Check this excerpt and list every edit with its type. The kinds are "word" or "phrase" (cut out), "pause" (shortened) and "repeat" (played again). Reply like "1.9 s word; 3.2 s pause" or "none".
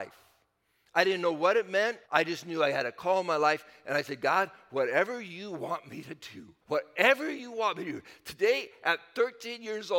2.0 s pause; 6.6 s pause